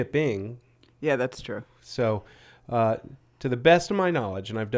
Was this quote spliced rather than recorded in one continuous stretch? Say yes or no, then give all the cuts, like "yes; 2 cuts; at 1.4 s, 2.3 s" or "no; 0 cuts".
no; 0 cuts